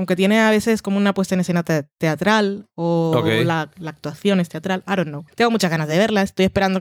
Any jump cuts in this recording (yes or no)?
no